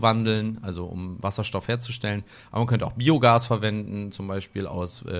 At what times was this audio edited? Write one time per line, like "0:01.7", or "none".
none